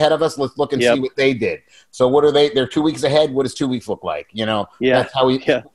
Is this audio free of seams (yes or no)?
yes